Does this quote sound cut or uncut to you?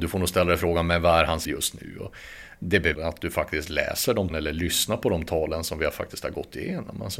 cut